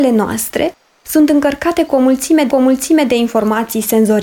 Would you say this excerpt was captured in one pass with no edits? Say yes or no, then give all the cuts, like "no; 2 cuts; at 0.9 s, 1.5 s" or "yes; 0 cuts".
no; 1 cut; at 2.5 s